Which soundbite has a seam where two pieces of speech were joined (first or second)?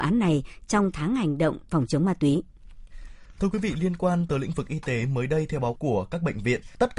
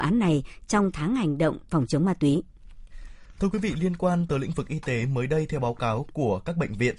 first